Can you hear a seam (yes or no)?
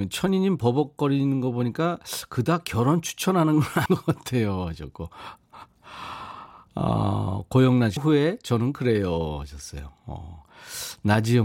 yes